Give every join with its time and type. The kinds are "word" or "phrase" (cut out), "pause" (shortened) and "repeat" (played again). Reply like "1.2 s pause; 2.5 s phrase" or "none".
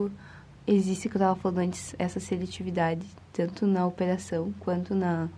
none